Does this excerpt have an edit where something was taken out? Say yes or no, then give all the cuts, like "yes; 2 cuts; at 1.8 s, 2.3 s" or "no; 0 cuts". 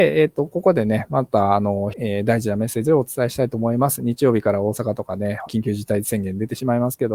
yes; 2 cuts; at 1.9 s, 5.5 s